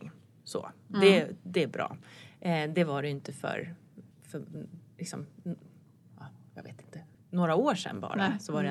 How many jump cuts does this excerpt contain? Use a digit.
2